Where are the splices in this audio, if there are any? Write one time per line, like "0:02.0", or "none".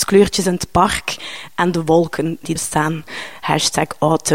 0:02.6